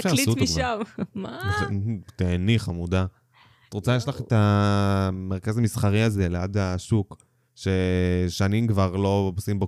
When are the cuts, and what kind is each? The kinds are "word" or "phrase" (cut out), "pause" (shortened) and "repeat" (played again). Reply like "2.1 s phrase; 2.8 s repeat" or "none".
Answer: none